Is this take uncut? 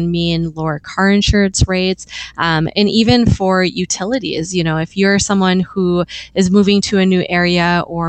yes; 0 cuts

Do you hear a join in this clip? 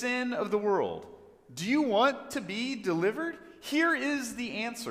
no; 0 cuts

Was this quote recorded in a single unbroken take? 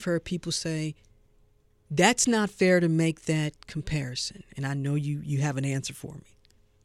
yes; 0 cuts

